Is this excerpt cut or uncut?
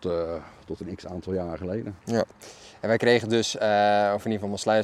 cut